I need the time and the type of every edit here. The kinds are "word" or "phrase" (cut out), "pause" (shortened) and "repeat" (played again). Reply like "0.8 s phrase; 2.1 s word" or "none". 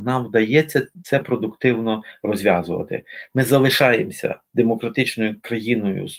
1.2 s word